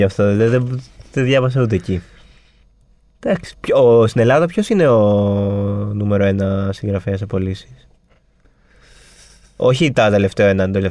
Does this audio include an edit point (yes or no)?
no